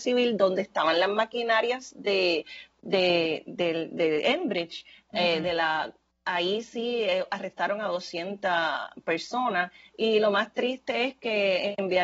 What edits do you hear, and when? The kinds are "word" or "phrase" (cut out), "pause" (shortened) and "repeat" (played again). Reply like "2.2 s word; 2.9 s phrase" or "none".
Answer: none